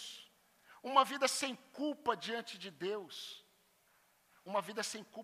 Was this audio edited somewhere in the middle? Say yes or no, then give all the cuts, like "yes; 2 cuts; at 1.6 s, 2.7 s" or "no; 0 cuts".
no; 0 cuts